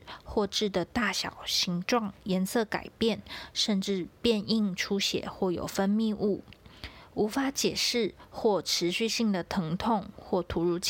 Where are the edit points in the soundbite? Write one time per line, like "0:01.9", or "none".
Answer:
none